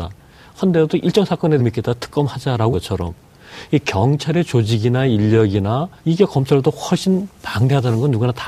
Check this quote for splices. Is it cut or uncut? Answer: cut